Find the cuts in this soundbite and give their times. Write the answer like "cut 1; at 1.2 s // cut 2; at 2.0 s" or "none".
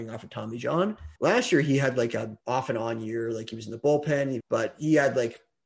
cut 1; at 1.2 s // cut 2; at 2.4 s // cut 3; at 4.4 s

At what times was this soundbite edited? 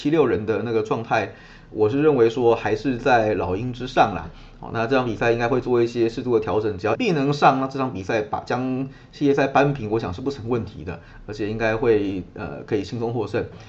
cut 1; at 6.9 s

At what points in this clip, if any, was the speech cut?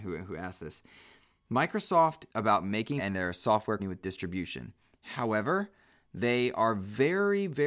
cut 1; at 2.3 s // cut 2; at 3.0 s // cut 3; at 3.8 s

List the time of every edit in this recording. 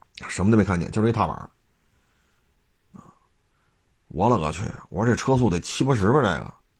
none

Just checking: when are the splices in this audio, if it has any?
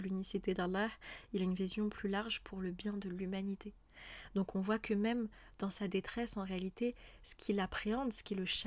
none

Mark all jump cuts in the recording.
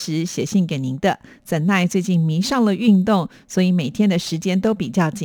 none

